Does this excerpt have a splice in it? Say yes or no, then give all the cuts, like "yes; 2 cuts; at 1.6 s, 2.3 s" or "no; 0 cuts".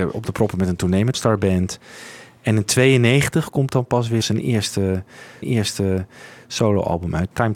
yes; 2 cuts; at 1.1 s, 5.4 s